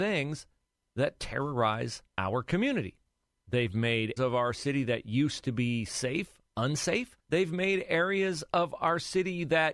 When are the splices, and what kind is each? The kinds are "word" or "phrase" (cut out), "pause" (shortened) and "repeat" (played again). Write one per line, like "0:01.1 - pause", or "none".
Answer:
0:02.1 - pause
0:03.3 - pause
0:04.2 - word
0:07.2 - pause

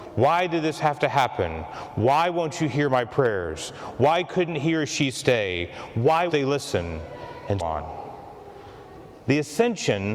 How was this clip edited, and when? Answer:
0:06.3 - word
0:07.6 - word

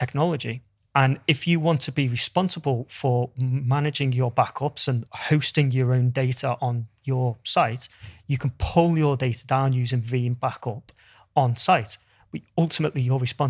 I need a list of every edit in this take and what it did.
0:05.1 - word

